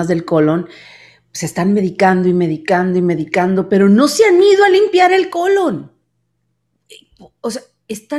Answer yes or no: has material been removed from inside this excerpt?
no